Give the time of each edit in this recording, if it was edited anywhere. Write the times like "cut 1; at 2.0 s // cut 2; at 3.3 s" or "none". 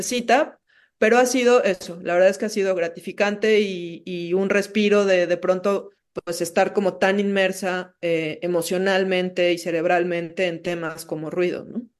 cut 1; at 6.0 s

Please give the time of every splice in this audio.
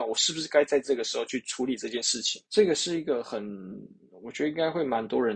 cut 1; at 2.5 s

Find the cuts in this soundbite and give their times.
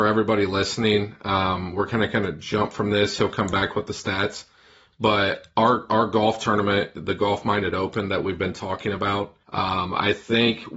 cut 1; at 9.4 s

